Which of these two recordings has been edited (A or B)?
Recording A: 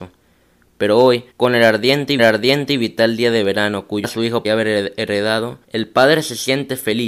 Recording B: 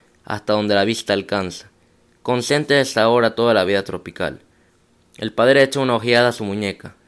A